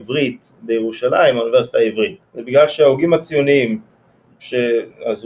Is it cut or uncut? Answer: cut